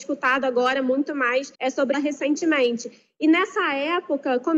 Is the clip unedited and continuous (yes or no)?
no